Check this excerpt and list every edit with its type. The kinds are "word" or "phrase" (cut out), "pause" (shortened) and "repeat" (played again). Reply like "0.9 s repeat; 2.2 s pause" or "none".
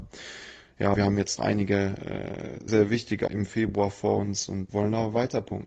0.9 s word; 1.4 s word; 2.7 s word; 3.3 s word; 4.7 s word

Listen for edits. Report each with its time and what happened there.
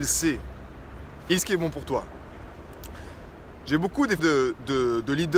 1.4 s word; 4.2 s word

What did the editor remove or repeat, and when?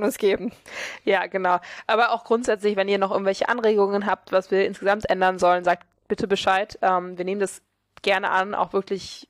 none

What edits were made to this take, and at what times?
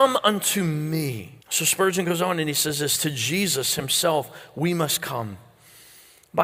1.4 s pause

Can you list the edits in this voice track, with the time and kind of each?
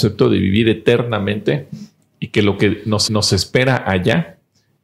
3.1 s repeat

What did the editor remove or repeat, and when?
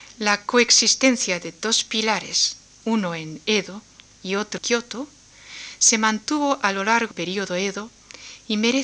4.6 s word; 7.1 s word

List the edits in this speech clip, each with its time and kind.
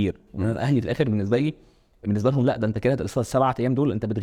none

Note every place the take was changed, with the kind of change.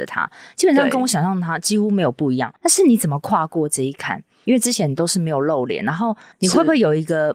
2.6 s pause

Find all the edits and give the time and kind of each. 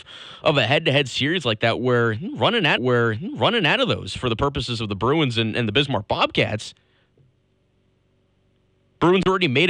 2.8 s repeat

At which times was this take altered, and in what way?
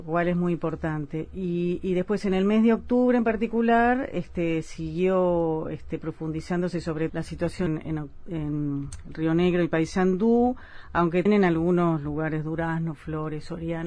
7.1 s word; 7.7 s word; 11.3 s word

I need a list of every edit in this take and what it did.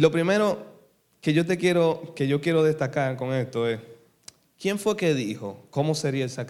none

